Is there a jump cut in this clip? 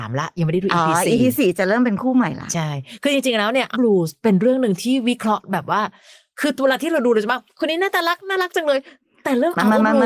yes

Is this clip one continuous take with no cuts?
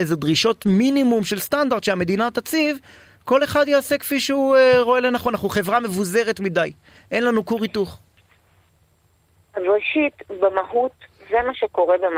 yes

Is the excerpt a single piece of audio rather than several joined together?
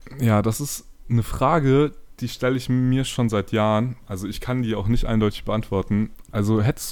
yes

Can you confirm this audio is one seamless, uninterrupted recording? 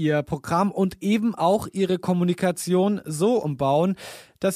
yes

